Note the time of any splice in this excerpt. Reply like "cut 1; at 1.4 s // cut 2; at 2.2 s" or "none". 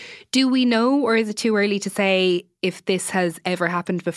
none